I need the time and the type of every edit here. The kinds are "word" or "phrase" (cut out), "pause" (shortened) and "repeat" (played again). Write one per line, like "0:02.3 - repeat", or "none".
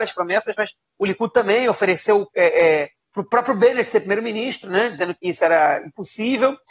none